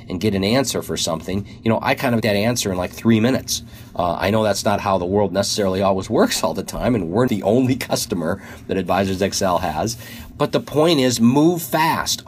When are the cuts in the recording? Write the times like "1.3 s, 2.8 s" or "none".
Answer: 2.2 s, 7.3 s